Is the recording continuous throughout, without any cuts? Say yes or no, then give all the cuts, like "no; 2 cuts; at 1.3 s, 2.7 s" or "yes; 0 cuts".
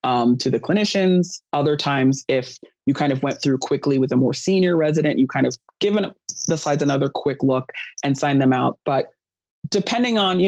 yes; 0 cuts